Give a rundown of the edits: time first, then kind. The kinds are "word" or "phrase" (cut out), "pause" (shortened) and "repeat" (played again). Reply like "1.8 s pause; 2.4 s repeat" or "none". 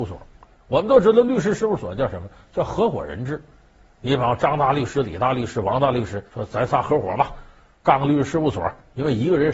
6.3 s pause